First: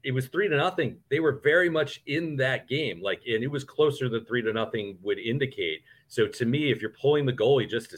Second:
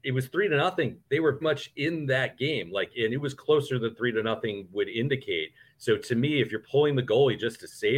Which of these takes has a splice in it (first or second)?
second